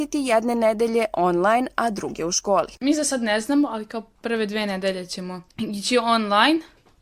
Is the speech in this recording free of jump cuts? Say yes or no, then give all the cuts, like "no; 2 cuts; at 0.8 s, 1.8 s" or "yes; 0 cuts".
no; 2 cuts; at 2.7 s, 5.5 s